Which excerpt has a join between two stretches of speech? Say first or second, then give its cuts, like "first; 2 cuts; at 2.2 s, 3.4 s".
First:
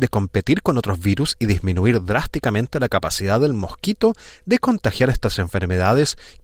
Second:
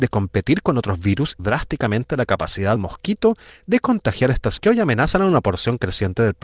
second; 3 cuts; at 1.4 s, 2.8 s, 4.6 s